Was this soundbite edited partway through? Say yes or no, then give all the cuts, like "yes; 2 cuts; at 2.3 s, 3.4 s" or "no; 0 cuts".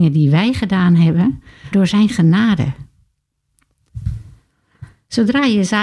yes; 1 cut; at 1.7 s